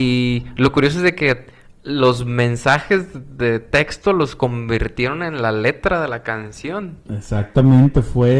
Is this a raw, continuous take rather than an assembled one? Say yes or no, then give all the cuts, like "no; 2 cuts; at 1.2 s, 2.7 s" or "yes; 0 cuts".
yes; 0 cuts